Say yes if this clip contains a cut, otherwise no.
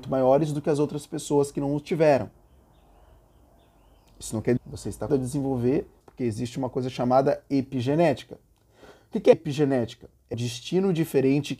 yes